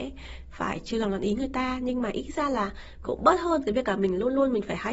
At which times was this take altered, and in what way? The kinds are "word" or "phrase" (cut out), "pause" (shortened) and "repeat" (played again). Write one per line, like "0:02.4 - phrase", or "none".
0:03.0 - word